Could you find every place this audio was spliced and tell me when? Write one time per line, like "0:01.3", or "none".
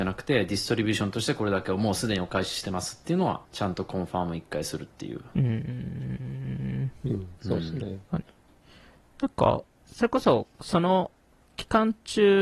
0:03.4
0:07.4
0:08.0
0:09.7
0:10.5

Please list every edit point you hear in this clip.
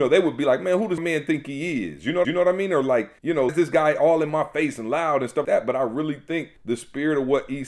0:01.0
0:02.2
0:03.2
0:03.5
0:05.4
0:06.6

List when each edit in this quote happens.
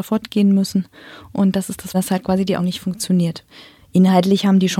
0:01.9
0:02.6

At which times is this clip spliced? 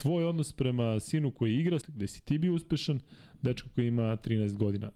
0:01.8

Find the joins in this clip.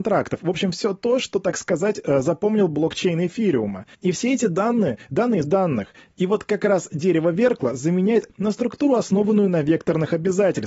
0:03.9
0:05.4
0:08.3

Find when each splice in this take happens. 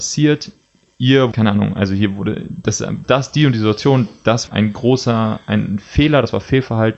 0:01.3
0:03.0
0:04.5

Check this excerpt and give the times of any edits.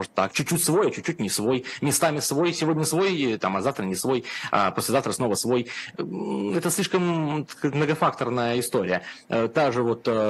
none

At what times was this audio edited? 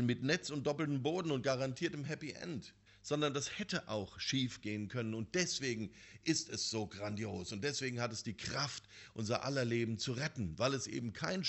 0:02.9

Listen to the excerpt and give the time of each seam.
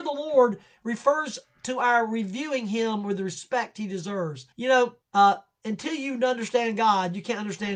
0:04.5
0:05.0

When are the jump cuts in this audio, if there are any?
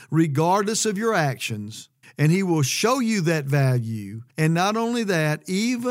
0:02.0
0:04.3

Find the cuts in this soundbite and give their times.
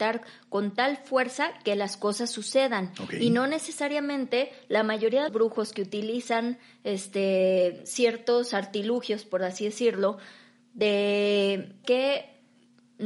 0:05.3
0:11.8

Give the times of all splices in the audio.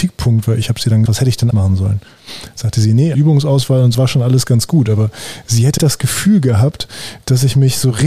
0:01.1
0:01.5
0:03.1
0:03.9
0:05.8

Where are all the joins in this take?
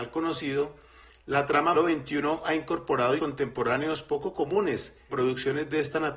0:01.7
0:03.2
0:05.1

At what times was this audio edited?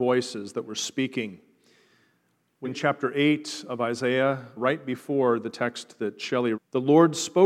0:02.6
0:04.6
0:06.5

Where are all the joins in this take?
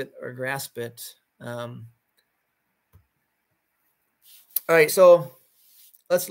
0:04.9

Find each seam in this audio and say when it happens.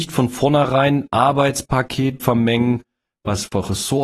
0:02.2

